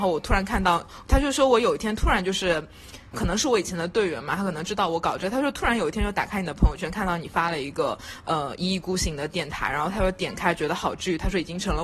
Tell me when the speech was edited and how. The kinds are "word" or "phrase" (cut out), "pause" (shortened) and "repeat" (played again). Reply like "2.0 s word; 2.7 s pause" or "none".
3.1 s word